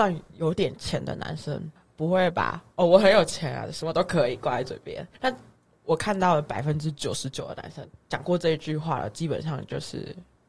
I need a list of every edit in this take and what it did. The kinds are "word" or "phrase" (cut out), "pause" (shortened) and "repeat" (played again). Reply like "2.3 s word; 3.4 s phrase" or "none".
1.8 s pause; 5.1 s pause